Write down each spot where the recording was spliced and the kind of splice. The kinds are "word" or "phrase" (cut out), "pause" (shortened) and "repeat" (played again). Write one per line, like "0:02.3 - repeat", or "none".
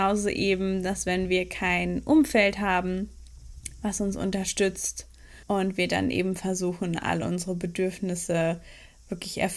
0:05.4 - pause

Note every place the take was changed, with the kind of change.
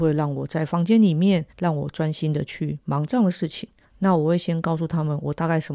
0:01.5 - pause
0:03.8 - pause

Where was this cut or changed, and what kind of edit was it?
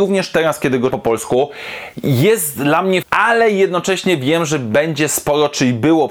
0:00.9 - word
0:03.0 - word

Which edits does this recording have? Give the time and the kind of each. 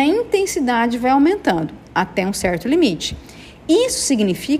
none

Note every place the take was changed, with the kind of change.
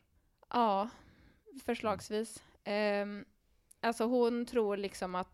none

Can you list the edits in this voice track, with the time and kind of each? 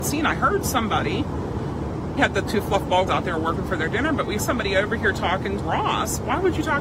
0:02.2 - word
0:03.1 - word
0:04.4 - word
0:05.6 - word

